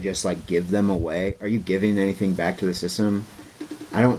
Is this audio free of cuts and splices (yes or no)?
yes